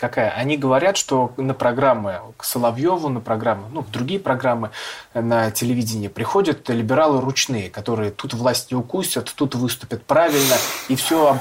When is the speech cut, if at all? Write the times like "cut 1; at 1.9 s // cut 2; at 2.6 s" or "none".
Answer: none

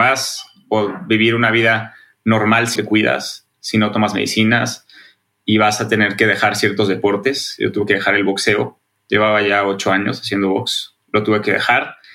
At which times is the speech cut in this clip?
cut 1; at 2.8 s

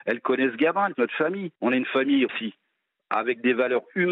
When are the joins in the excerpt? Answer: cut 1; at 0.9 s // cut 2; at 1.5 s // cut 3; at 2.3 s

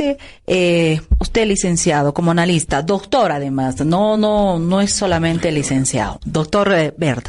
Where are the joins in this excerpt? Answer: none

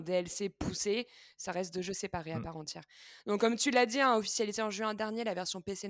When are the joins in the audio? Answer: none

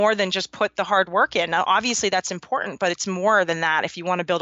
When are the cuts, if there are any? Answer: none

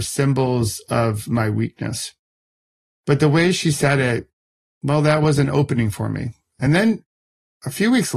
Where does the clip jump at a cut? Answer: none

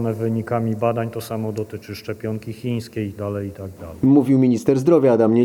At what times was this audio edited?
cut 1; at 3.2 s

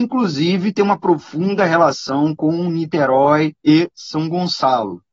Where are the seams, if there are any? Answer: cut 1; at 3.6 s

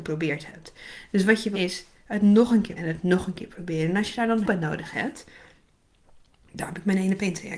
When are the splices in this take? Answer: cut 1; at 1.5 s // cut 2; at 2.8 s // cut 3; at 4.4 s

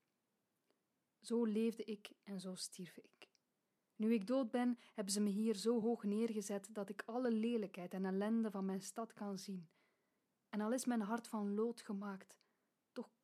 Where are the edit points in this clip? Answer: none

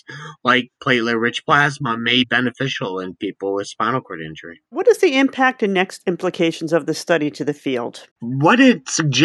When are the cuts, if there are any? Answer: cut 1; at 2.2 s // cut 2; at 4.7 s // cut 3; at 8.1 s

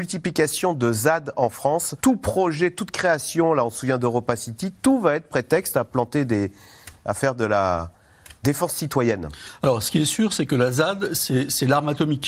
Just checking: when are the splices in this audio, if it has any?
cut 1; at 2.0 s

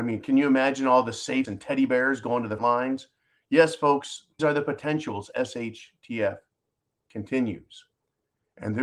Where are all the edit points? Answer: cut 1; at 1.4 s // cut 2; at 2.6 s // cut 3; at 4.4 s // cut 4; at 5.3 s

